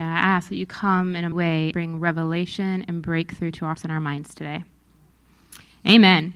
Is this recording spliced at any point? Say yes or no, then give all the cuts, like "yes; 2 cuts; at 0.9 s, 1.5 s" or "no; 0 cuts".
yes; 3 cuts; at 1.3 s, 1.7 s, 3.7 s